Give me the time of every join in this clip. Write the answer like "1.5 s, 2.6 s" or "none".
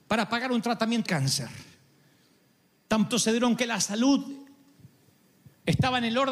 1.1 s, 3.1 s, 3.6 s